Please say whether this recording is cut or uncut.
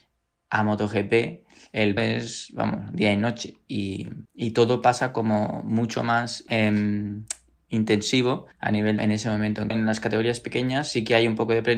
cut